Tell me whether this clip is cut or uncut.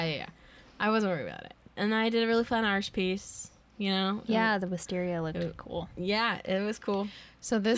uncut